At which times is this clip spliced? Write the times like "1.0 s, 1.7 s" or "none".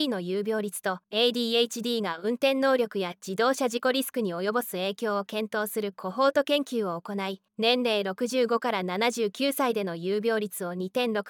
1.0 s, 7.5 s